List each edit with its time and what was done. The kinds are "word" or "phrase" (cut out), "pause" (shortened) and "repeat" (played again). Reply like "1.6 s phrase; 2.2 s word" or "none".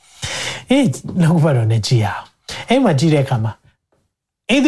none